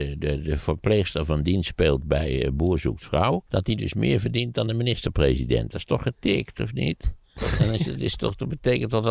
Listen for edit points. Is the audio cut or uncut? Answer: cut